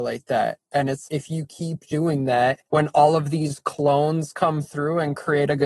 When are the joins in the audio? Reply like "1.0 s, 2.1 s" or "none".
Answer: 1.1 s, 2.7 s